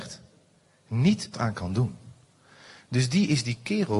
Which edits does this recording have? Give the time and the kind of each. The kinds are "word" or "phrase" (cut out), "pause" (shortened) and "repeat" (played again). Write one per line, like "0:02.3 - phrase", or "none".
0:01.3 - phrase